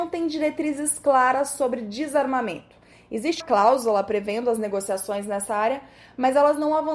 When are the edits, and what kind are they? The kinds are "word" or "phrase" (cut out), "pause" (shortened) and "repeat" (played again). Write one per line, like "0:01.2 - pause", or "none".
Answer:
0:03.4 - word